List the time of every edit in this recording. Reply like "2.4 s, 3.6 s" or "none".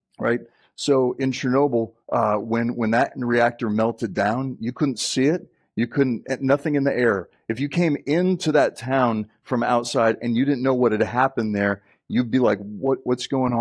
2.0 s